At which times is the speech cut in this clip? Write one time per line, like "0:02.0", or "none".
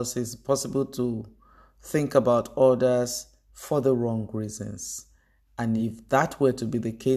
none